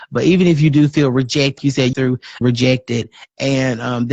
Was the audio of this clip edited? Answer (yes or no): yes